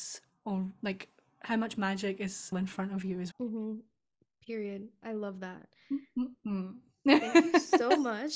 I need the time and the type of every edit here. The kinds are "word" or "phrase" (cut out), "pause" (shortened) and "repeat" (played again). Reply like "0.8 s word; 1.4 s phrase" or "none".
2.5 s word; 3.3 s word